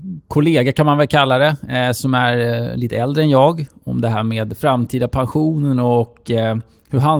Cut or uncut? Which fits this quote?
uncut